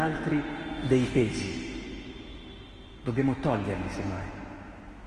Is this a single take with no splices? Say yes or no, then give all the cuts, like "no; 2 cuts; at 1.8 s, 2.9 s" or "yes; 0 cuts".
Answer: yes; 0 cuts